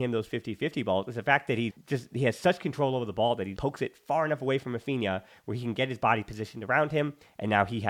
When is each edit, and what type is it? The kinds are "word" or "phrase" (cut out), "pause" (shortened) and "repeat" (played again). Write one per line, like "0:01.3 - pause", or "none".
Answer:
0:01.7 - word
0:03.6 - word